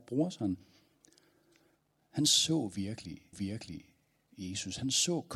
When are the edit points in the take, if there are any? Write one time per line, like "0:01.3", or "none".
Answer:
0:03.3

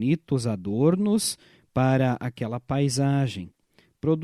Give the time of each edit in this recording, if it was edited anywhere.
none

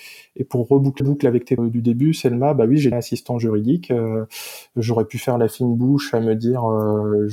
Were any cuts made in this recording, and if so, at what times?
0:01.0
0:01.6
0:02.9

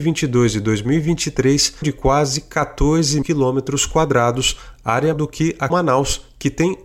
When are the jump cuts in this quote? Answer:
0:01.8
0:03.2
0:05.1
0:05.7

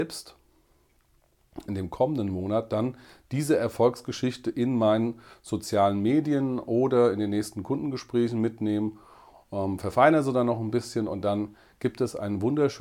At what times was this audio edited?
0:01.7

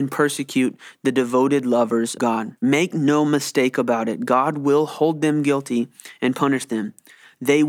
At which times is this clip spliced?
0:02.2
0:02.6

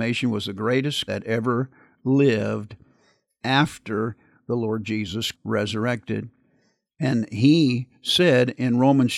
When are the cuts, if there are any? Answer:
0:01.1
0:05.3

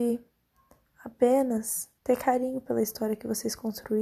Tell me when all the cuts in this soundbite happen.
0:02.0

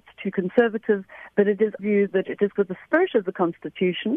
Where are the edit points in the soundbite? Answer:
0:01.8
0:02.6

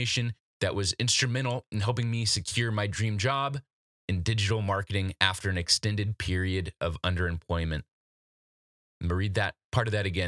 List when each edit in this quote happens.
none

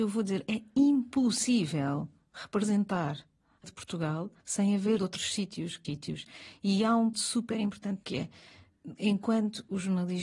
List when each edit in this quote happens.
0:03.6
0:04.4
0:05.0
0:05.8
0:07.1
0:08.0

